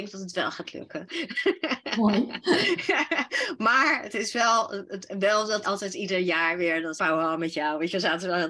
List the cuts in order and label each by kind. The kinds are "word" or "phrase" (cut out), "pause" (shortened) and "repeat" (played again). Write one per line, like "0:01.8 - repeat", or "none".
0:05.6 - word
0:07.0 - phrase